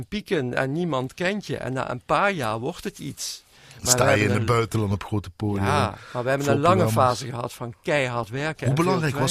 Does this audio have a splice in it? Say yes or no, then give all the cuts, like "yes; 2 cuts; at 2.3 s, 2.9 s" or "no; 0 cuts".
no; 0 cuts